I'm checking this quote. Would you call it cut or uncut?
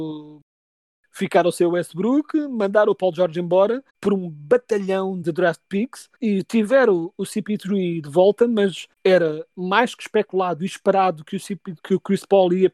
cut